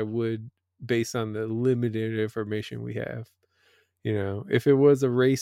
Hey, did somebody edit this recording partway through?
no; 0 cuts

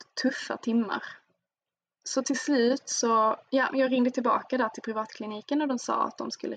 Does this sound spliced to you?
no; 0 cuts

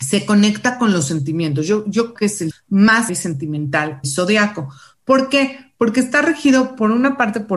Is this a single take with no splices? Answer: no; 4 cuts; at 2.2 s, 2.5 s, 3.1 s, 4.0 s

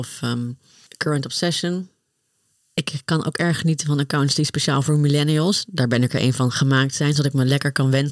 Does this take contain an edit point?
no; 0 cuts

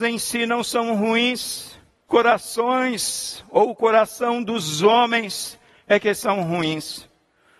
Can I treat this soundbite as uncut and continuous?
no; 1 cut; at 2.1 s

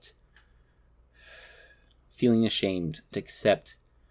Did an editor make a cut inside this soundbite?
yes; 1 cut; at 3.1 s

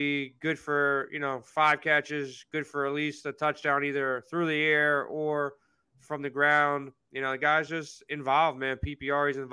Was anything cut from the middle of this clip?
no; 0 cuts

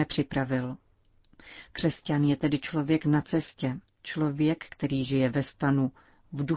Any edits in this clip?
no; 0 cuts

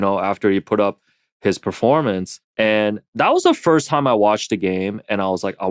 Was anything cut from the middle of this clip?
yes; 1 cut; at 2.5 s

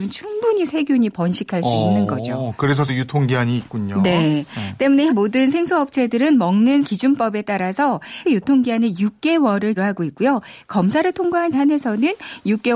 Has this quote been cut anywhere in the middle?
yes; 6 cuts; at 2.9 s, 5.1 s, 6.8 s, 8.2 s, 9.8 s, 11.5 s

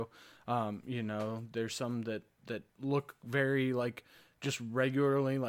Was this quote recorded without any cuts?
no; 1 cut; at 2.7 s

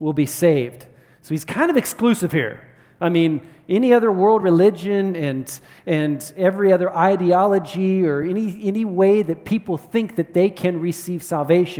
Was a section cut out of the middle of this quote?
no; 0 cuts

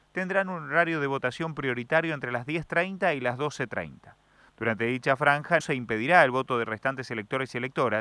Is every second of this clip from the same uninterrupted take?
no; 1 cut; at 5.6 s

